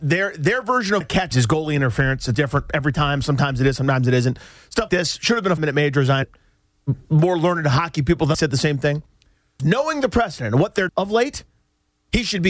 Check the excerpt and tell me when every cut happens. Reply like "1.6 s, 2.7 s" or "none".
1.0 s, 1.3 s, 2.3 s, 4.9 s, 5.6 s, 6.2 s, 8.3 s, 9.6 s, 10.9 s